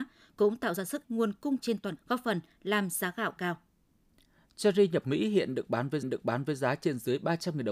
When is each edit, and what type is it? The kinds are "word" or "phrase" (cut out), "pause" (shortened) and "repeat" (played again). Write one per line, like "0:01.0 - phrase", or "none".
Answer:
0:01.0 - word
0:01.6 - word
0:02.0 - word
0:03.4 - word
0:05.0 - word
0:06.0 - repeat